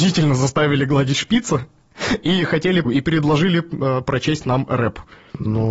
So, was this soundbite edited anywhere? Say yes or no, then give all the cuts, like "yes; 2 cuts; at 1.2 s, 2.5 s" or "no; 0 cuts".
yes; 1 cut; at 2.8 s